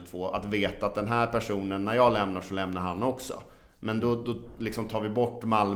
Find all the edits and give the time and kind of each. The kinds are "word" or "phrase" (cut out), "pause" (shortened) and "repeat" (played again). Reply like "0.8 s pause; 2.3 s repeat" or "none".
none